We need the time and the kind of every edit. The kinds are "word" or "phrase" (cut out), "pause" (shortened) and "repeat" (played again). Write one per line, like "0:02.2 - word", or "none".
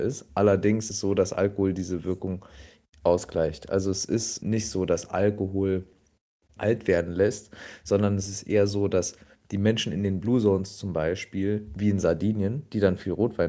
0:00.9 - word
0:04.4 - word
0:06.6 - word